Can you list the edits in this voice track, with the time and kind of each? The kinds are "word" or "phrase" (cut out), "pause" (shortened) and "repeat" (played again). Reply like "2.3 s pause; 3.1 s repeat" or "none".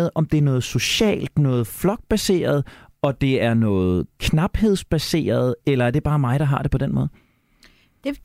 none